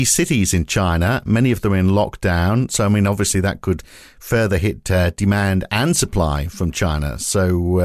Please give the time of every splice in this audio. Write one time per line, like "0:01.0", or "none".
none